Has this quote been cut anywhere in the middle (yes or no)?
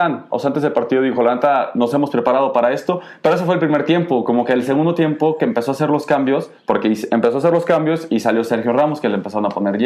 yes